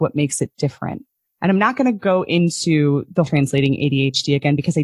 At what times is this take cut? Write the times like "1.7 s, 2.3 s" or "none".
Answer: 1.3 s, 3.3 s